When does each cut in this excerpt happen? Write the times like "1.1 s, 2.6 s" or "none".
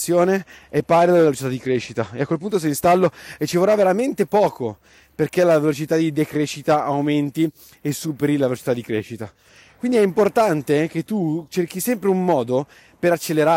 none